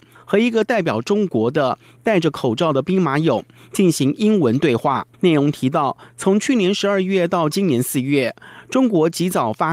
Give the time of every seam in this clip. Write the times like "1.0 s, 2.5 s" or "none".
5.1 s